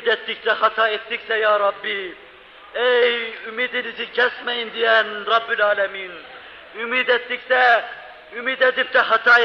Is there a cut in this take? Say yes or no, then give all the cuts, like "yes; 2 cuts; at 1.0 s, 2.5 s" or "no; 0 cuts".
no; 0 cuts